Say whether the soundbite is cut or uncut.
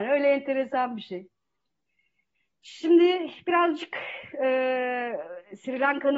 uncut